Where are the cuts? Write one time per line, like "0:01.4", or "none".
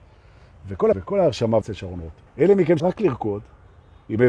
0:00.9
0:01.6
0:02.3
0:02.8